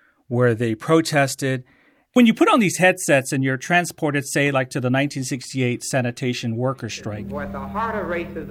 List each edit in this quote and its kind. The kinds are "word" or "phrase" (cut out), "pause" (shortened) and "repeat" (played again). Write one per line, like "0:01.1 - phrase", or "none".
none